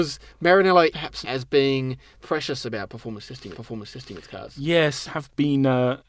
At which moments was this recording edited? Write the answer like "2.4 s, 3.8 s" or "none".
0.9 s, 1.2 s, 2.2 s, 3.5 s, 5.1 s